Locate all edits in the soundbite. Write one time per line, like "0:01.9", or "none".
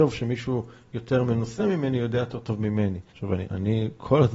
0:03.1
0:03.4